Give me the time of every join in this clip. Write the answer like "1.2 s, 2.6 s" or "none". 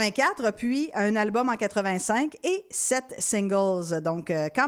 none

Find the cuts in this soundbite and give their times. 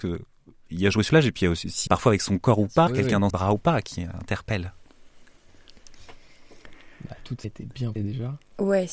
1.1 s, 1.9 s, 2.9 s, 3.3 s, 3.8 s, 7.4 s, 8.0 s

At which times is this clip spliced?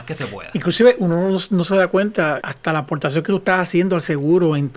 2.4 s

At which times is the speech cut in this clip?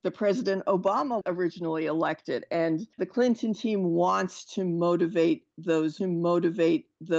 1.2 s, 2.9 s, 6.0 s

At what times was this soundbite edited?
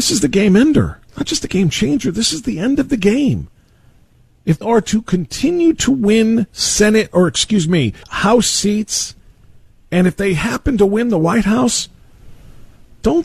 1.1 s, 4.6 s, 8.0 s

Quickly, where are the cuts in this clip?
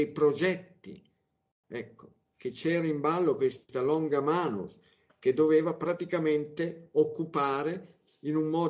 none

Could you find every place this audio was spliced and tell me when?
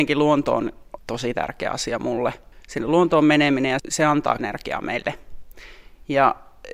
1.0 s, 3.8 s, 4.4 s

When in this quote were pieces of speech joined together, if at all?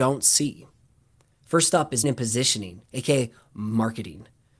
2.0 s, 2.8 s

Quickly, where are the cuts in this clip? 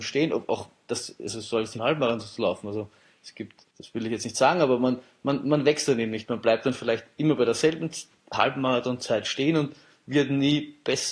1.8 s, 3.7 s

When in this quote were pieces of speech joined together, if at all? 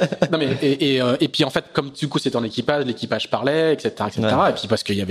none

